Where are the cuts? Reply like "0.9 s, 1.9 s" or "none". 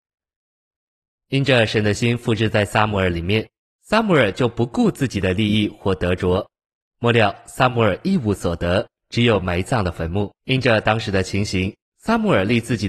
10.4 s